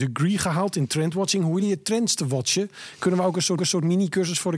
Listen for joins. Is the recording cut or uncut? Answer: cut